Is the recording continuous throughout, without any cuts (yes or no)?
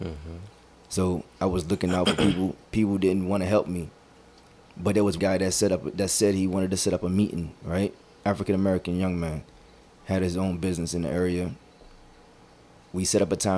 no